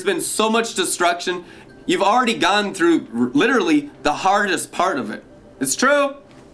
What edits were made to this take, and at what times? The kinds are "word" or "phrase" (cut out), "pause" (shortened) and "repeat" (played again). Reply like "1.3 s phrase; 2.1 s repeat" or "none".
none